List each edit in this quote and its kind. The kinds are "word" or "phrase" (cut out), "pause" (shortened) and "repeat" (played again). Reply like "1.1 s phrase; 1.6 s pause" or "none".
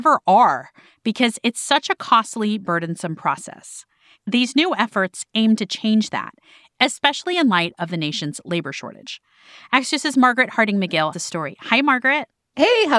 11.1 s word